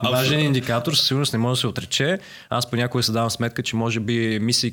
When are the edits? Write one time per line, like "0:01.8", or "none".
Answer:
none